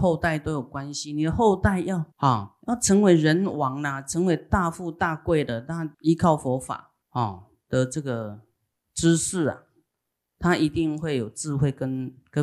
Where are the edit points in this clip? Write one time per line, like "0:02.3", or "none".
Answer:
0:02.1
0:05.9
0:07.0